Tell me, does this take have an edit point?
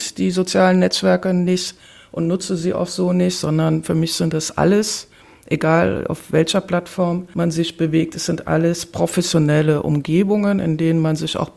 no; 0 cuts

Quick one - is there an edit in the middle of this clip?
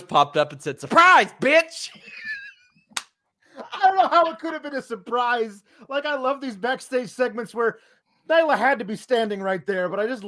no; 0 cuts

